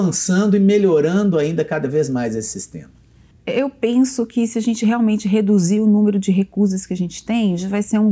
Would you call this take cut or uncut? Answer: uncut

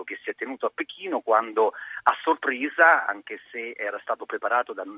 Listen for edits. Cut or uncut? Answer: uncut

